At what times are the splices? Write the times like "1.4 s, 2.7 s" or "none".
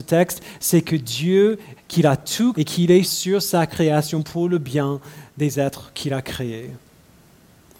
1.8 s, 2.5 s, 3.0 s